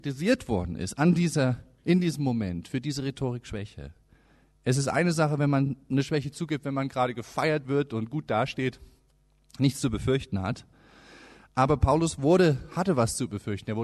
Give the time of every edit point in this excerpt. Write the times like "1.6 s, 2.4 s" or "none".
none